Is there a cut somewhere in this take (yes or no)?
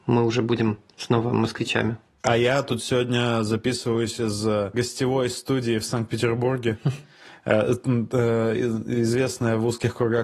no